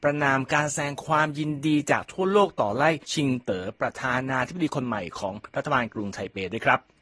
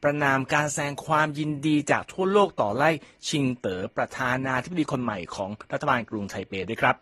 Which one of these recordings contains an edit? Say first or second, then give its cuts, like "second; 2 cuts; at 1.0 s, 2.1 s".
first; 1 cut; at 3.0 s